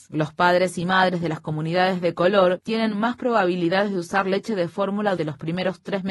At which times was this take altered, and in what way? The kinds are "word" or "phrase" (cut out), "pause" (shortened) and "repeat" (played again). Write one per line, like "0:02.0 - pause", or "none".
0:05.2 - word